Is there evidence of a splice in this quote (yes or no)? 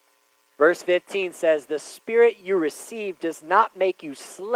no